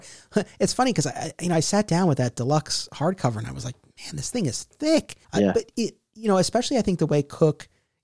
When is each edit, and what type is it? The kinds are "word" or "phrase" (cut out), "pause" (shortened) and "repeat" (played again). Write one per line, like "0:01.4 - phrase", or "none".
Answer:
0:05.2 - pause